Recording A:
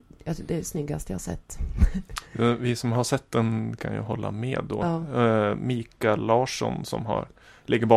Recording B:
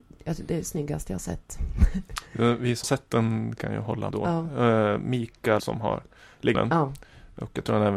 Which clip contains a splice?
B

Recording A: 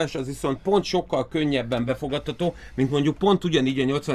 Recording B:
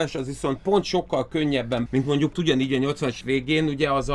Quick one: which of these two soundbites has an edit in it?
B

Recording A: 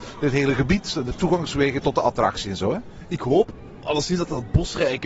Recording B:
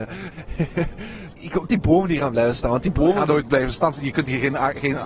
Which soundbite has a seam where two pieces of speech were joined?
B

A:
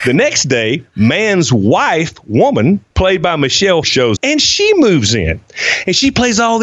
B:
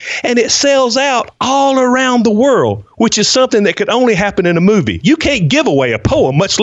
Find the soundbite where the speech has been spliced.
A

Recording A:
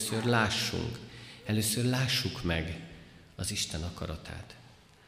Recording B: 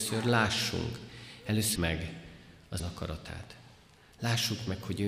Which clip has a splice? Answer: B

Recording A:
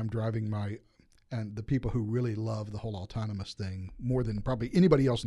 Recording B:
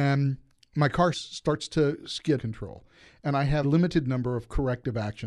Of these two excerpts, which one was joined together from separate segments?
B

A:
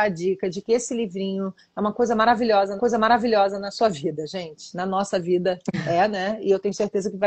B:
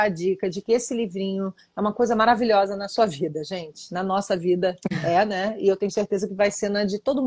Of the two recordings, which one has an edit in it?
A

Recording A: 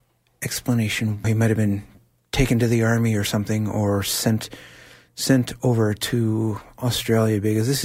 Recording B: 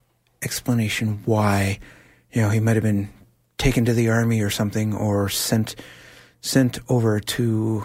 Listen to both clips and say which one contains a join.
A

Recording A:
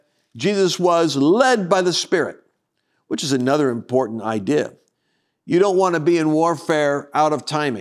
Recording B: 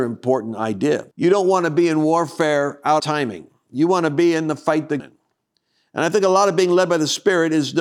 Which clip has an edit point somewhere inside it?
B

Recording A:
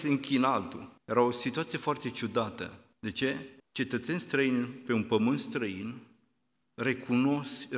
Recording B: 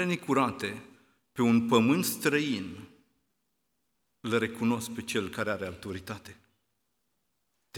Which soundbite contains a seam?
A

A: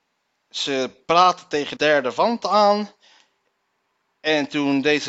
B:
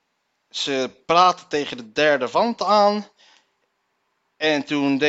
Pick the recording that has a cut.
A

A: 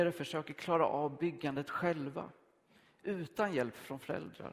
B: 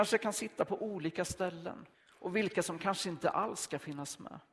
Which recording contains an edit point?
B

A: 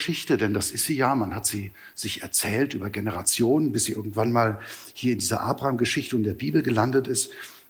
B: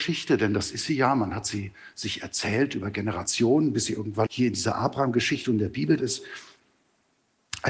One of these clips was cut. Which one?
B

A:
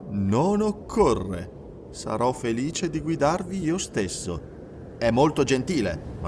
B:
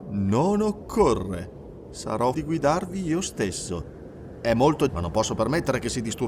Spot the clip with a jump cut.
B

